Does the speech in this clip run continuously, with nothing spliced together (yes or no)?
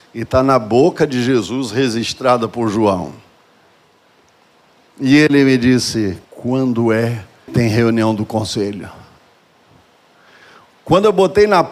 no